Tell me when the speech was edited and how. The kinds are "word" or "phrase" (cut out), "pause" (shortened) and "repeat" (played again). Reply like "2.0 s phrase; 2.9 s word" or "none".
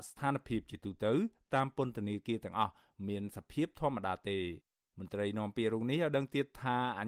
none

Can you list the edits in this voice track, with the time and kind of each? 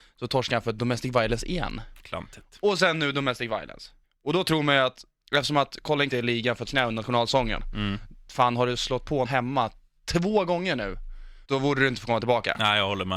4.0 s pause; 5.2 s pause; 6.1 s phrase; 6.6 s phrase; 9.2 s word; 11.4 s pause

